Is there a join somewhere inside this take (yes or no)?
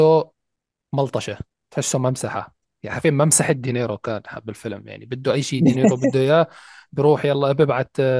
no